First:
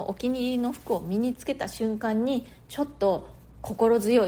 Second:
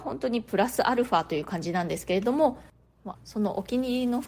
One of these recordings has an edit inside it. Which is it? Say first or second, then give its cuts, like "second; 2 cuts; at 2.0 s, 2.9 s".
second; 1 cut; at 3.1 s